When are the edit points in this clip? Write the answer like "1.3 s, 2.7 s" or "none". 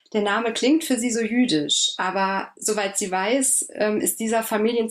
none